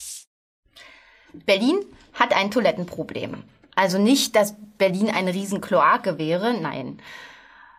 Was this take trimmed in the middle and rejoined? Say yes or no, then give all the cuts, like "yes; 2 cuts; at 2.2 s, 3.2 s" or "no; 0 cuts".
no; 0 cuts